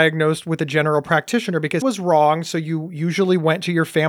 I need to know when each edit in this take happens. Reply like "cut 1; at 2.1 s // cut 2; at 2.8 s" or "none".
cut 1; at 1.8 s